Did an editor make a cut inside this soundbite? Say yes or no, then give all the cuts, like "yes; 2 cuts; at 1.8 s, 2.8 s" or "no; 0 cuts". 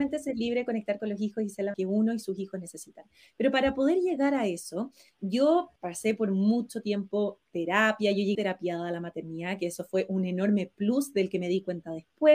yes; 3 cuts; at 1.7 s, 5.8 s, 8.3 s